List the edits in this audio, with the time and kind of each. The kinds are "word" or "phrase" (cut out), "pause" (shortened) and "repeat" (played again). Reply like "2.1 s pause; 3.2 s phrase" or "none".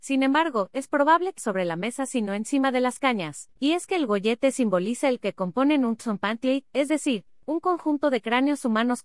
1.4 s phrase; 3.6 s pause; 5.2 s word